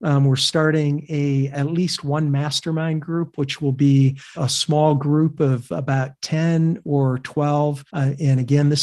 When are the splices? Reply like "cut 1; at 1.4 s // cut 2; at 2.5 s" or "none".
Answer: cut 1; at 4.3 s // cut 2; at 7.9 s